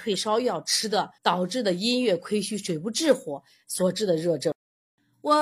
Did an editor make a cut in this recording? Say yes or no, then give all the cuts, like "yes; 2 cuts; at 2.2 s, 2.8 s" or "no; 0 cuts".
yes; 1 cut; at 1.2 s